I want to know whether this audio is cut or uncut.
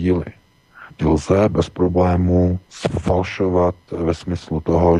cut